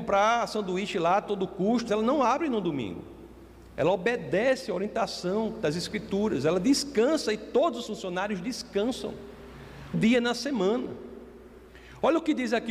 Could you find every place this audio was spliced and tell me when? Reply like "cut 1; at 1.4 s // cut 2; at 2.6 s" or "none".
cut 1; at 1.9 s // cut 2; at 7.9 s // cut 3; at 9.9 s